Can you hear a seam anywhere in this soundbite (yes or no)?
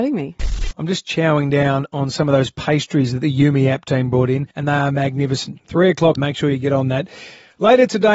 yes